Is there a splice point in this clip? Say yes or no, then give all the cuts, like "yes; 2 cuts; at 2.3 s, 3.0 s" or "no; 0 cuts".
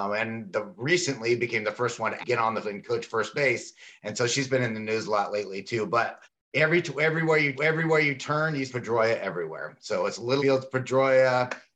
yes; 6 cuts; at 2.2 s, 2.6 s, 6.2 s, 7.6 s, 8.7 s, 10.4 s